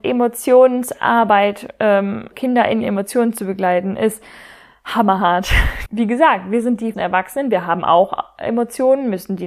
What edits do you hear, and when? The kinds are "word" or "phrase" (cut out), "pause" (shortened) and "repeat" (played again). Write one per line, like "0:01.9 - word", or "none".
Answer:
0:02.3 - word
0:02.8 - word
0:05.9 - word
0:06.9 - word